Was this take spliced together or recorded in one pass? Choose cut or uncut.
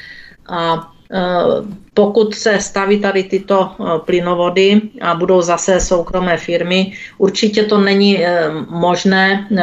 uncut